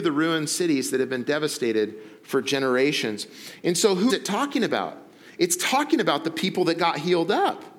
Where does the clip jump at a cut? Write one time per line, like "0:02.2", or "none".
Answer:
0:04.1